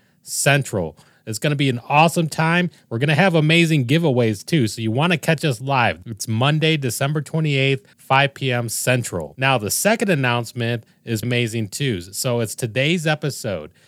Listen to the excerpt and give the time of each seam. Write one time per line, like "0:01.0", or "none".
0:07.9
0:11.2